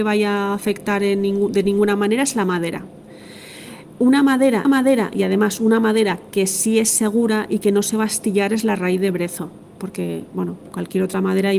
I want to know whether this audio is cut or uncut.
cut